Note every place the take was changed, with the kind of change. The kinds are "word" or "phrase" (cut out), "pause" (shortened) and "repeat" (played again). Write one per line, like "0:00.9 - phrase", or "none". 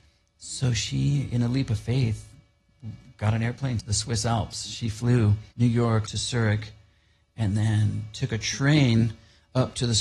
0:03.8 - phrase
0:05.5 - pause
0:06.1 - word